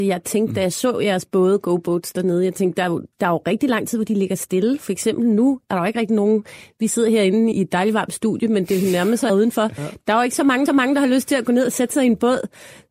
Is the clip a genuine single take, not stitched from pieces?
no; 4 cuts; at 3.1 s, 7.5 s, 9.3 s, 10.7 s

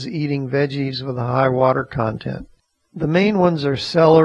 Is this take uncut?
yes; 0 cuts

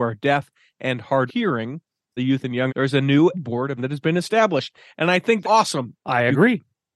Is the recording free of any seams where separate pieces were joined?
no; 6 cuts; at 1.3 s, 2.2 s, 2.7 s, 3.3 s, 3.8 s, 5.4 s

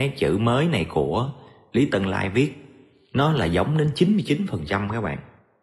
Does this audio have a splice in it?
no; 0 cuts

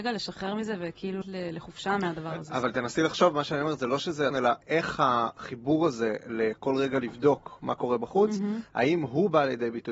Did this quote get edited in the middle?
yes; 3 cuts; at 1.2 s, 4.3 s, 4.6 s

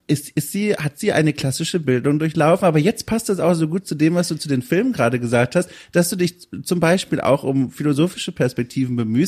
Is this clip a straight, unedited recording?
yes; 0 cuts

